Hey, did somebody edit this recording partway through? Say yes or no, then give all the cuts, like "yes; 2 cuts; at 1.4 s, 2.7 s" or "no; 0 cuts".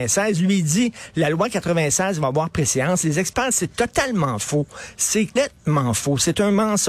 yes; 2 cuts; at 3.5 s, 5.4 s